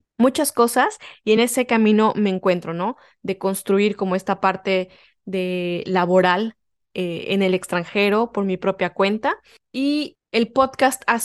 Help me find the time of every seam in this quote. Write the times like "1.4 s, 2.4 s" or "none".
none